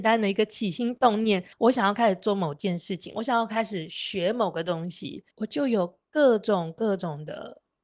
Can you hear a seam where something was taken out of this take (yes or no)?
yes